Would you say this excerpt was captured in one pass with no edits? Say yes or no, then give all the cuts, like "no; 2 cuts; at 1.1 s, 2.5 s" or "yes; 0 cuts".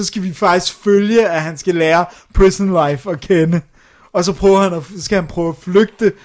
yes; 0 cuts